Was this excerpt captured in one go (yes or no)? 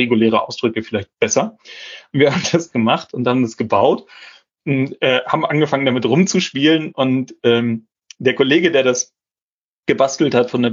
no